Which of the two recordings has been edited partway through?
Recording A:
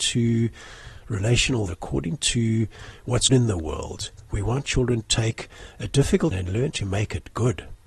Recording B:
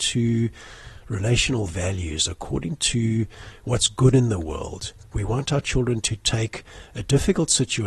A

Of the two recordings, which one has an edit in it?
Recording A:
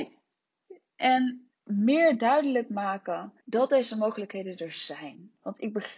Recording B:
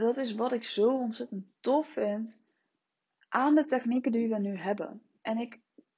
A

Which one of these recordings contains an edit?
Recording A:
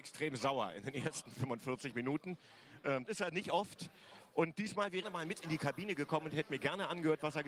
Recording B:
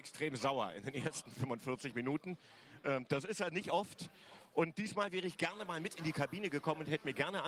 A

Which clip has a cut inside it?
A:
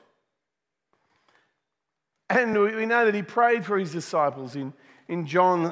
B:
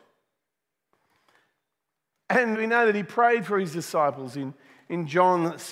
B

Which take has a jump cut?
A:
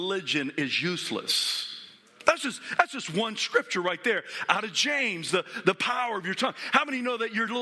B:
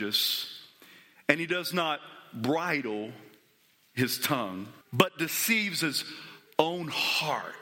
B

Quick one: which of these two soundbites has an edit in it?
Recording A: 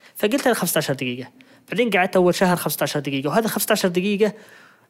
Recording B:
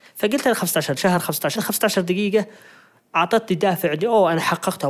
B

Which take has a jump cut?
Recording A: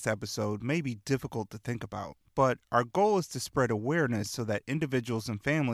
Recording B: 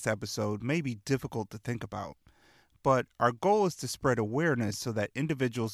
A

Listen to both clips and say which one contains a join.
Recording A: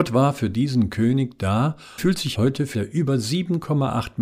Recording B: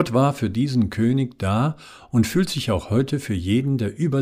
A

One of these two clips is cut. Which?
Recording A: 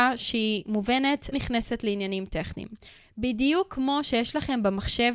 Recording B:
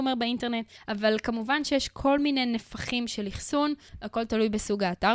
A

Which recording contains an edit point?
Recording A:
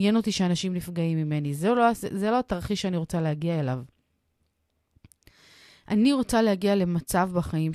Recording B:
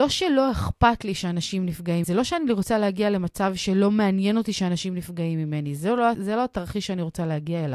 B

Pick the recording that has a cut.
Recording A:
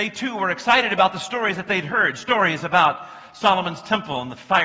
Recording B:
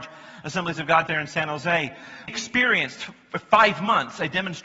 B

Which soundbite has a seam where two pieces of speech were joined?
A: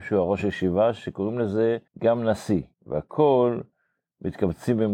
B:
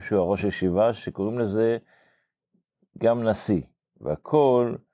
A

